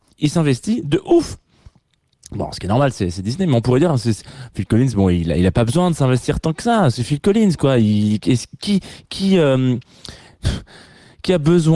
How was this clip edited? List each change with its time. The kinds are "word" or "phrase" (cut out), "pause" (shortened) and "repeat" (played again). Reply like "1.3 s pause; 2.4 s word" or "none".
none